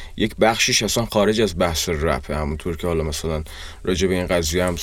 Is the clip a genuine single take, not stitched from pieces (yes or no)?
yes